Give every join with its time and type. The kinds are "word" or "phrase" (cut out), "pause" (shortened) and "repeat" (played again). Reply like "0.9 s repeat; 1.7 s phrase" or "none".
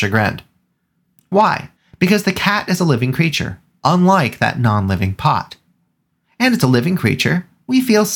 1.8 s pause